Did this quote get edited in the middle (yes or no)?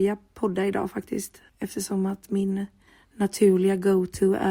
yes